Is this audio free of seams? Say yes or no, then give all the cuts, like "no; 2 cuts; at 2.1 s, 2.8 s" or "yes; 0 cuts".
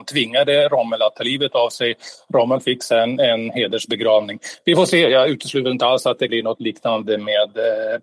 no; 1 cut; at 6.3 s